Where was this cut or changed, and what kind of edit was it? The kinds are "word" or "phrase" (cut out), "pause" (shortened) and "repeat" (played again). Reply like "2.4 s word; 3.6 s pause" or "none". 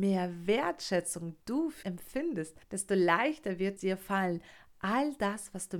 1.4 s pause; 1.8 s word; 2.6 s pause; 3.8 s word